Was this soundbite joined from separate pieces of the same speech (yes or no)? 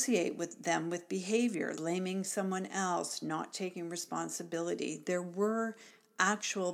yes